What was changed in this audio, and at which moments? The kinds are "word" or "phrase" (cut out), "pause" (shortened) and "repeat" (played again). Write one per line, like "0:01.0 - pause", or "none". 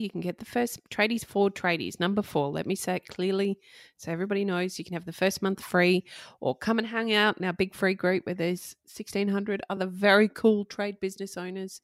none